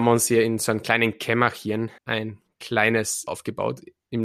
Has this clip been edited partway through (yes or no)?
yes